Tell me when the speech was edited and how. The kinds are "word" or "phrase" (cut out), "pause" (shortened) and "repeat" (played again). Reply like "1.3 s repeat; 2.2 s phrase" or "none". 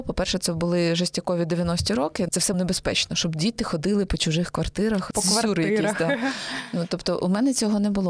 2.5 s word

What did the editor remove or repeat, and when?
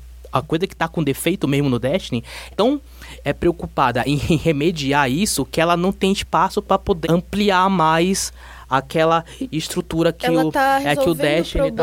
2.5 s phrase; 7.0 s word

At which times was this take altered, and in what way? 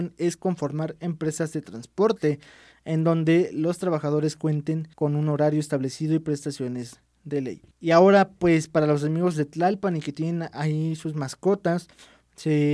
4.9 s pause; 7.7 s pause

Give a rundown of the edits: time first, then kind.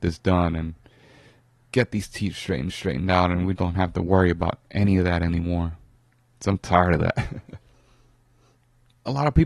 2.7 s repeat; 3.6 s word; 7.6 s pause

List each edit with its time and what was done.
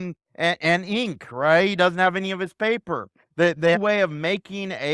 3.7 s phrase

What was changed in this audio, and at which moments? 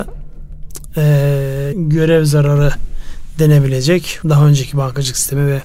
1.7 s word; 4.2 s word

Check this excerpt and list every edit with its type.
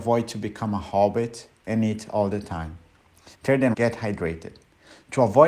3.3 s pause; 3.7 s phrase

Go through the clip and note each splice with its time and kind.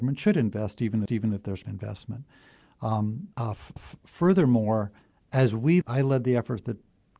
1.1 s repeat; 1.6 s word; 3.3 s pause; 3.8 s repeat; 5.8 s phrase

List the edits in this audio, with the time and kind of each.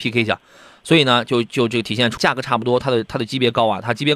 2.2 s word

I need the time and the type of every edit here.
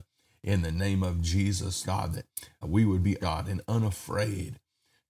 1.8 s word; 2.6 s word; 3.2 s phrase

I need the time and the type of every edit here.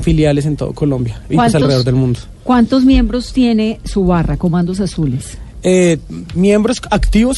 none

